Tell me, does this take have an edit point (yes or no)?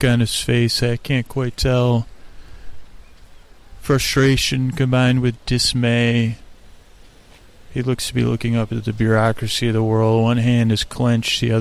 no